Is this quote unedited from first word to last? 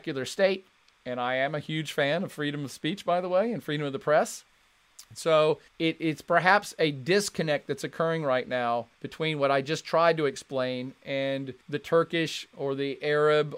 no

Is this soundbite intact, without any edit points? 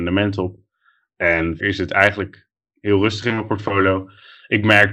no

